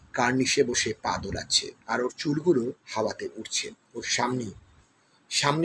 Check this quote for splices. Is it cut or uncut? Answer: cut